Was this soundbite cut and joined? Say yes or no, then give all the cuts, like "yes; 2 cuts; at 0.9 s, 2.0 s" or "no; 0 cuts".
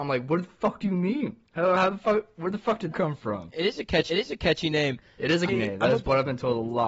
yes; 4 cuts; at 1.5 s, 2.9 s, 4.1 s, 5.5 s